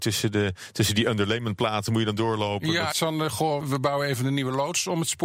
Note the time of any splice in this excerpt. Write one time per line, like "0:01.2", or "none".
0:02.9
0:03.6